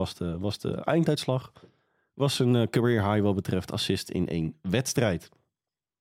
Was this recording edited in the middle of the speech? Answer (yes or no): no